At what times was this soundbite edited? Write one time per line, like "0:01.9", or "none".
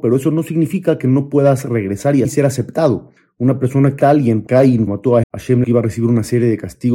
0:02.2
0:03.2
0:04.0
0:04.5
0:04.9
0:05.2
0:05.6